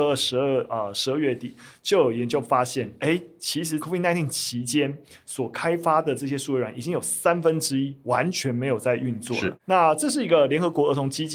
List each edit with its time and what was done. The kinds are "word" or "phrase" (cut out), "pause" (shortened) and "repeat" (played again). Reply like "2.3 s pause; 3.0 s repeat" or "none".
3.8 s word